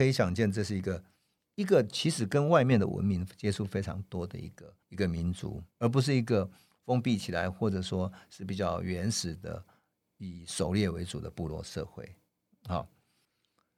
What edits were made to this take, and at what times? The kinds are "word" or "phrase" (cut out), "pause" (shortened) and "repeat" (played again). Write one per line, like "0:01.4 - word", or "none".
0:04.8 - pause